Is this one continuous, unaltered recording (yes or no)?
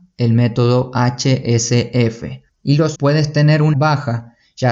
no